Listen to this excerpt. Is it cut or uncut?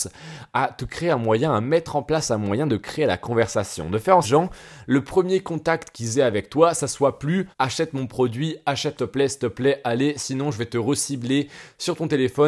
cut